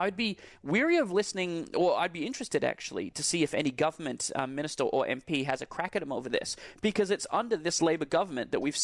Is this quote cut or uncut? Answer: uncut